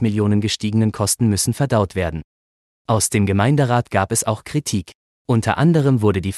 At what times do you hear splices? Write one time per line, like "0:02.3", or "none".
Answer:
none